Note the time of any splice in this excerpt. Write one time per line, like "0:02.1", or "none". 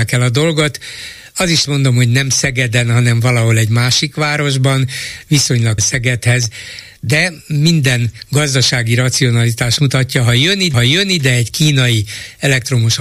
0:01.7
0:05.8
0:09.8
0:10.7